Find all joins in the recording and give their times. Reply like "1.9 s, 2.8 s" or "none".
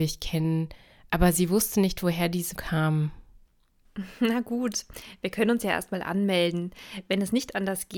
2.6 s